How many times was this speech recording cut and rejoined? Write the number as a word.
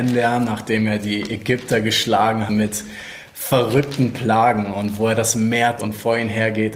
two